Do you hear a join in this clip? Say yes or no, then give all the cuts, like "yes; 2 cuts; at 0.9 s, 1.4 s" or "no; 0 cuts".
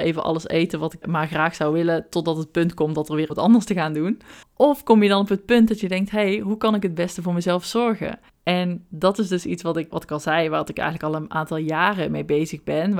yes; 5 cuts; at 1.0 s, 3.3 s, 4.4 s, 8.3 s, 9.9 s